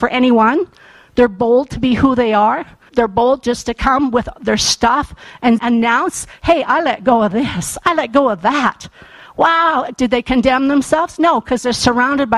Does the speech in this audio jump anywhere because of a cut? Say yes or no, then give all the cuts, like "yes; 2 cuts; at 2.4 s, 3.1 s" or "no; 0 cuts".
yes; 2 cuts; at 2.9 s, 5.6 s